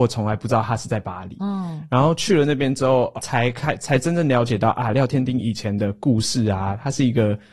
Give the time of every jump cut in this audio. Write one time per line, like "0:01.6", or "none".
0:03.2